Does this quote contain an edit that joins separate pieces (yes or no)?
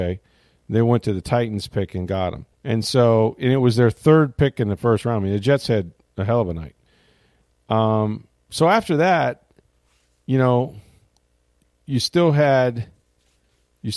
yes